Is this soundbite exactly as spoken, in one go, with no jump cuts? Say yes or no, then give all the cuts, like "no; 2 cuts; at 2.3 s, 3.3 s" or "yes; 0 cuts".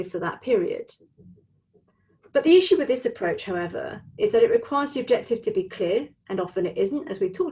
yes; 0 cuts